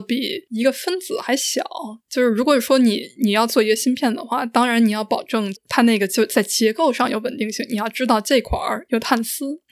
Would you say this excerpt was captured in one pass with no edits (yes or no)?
no